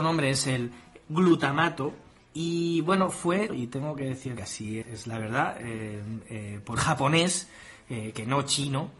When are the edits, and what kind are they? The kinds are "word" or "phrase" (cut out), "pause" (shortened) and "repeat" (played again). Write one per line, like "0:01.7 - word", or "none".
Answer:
0:02.2 - pause
0:03.5 - word
0:04.4 - phrase
0:04.8 - word
0:06.8 - word